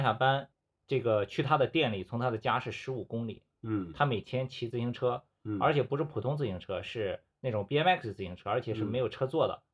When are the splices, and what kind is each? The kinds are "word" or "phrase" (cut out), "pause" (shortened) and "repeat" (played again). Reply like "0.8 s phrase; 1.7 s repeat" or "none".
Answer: none